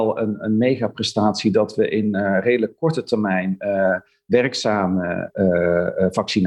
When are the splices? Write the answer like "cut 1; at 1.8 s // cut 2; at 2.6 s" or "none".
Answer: none

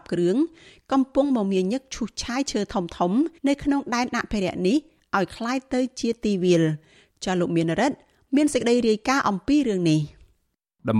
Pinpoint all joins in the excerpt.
cut 1; at 3.4 s

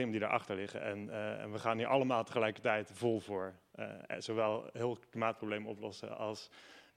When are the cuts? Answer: none

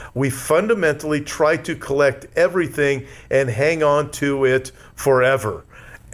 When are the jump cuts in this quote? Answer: none

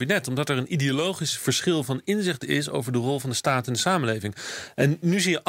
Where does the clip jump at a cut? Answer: none

